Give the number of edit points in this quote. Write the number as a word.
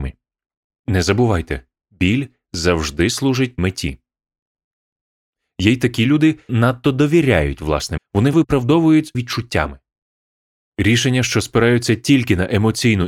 five